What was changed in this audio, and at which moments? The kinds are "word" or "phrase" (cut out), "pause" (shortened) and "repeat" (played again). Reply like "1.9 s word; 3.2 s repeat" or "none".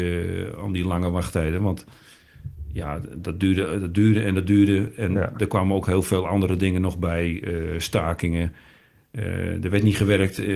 none